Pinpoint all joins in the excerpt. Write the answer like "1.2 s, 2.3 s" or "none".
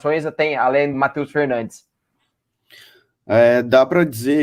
0.9 s